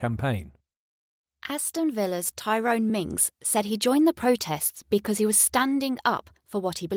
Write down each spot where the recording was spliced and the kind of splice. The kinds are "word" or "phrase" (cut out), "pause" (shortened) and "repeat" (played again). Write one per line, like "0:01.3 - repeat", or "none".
none